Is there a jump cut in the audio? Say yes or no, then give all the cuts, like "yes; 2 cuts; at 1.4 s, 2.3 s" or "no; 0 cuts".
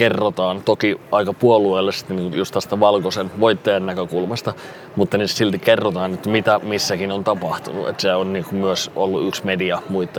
no; 0 cuts